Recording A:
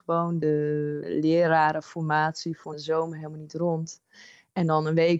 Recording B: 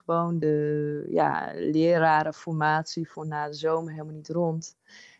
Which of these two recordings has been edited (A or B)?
A